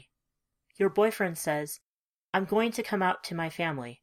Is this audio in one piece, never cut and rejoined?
yes; 0 cuts

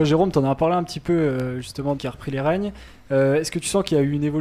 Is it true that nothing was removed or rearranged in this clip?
no; 1 cut; at 2.0 s

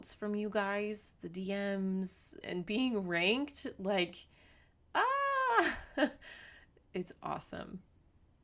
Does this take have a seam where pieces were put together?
yes; 1 cut; at 2.4 s

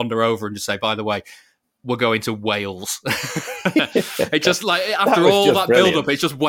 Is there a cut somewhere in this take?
no; 0 cuts

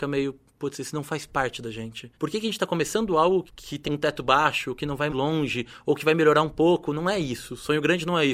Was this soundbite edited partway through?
yes; 3 cuts; at 2.1 s, 3.8 s, 5.1 s

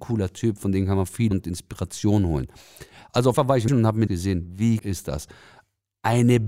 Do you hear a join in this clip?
yes; 5 cuts; at 1.3 s, 3.3 s, 3.7 s, 4.1 s, 4.8 s

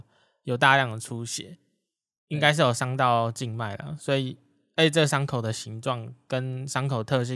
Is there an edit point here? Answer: no; 0 cuts

